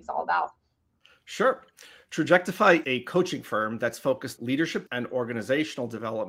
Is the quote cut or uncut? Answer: cut